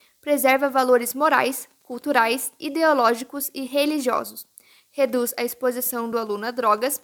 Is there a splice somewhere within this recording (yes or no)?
no